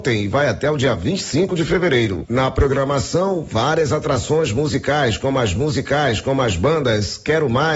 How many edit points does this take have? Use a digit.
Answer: 1